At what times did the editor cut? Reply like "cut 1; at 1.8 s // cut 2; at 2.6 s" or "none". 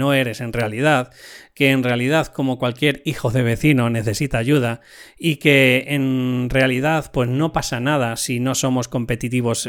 none